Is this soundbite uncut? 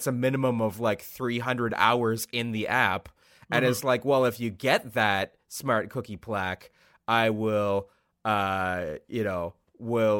yes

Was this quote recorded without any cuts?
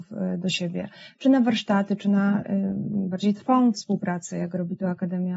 yes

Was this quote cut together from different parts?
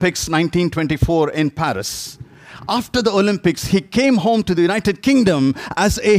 no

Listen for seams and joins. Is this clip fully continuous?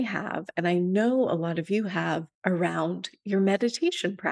no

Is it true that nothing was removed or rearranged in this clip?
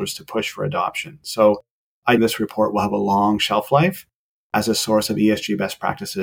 no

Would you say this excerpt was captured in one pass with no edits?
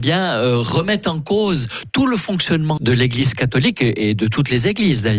no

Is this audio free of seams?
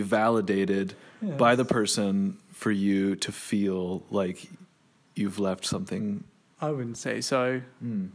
yes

